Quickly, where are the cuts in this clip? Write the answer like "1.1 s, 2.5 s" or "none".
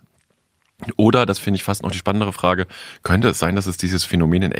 none

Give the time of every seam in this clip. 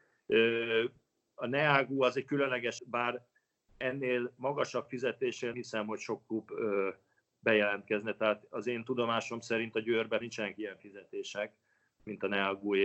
2.8 s, 5.5 s, 10.2 s

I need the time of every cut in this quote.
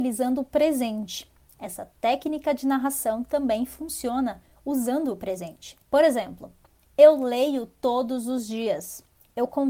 5.8 s

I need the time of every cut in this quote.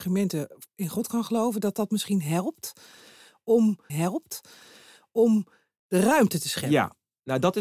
3.9 s

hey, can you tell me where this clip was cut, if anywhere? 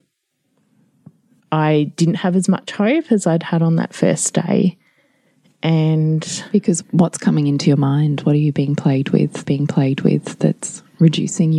6.8 s, 9.4 s

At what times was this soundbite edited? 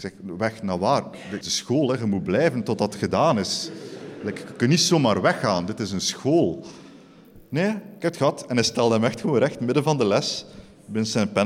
1.4 s

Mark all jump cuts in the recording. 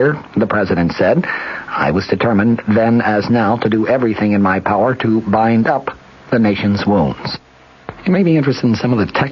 none

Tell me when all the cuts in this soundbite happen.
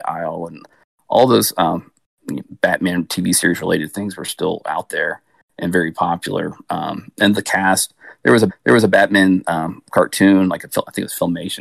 7.4 s, 8.5 s

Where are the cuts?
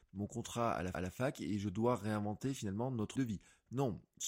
0.9 s, 3.2 s

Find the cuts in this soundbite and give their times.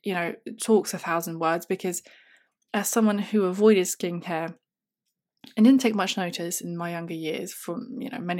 none

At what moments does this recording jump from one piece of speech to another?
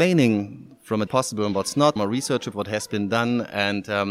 1.1 s, 2.0 s, 2.5 s

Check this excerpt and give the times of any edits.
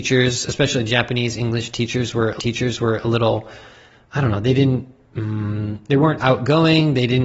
2.4 s, 6.2 s

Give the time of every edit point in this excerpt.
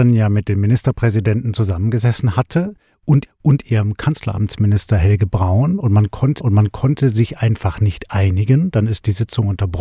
3.3 s, 6.4 s

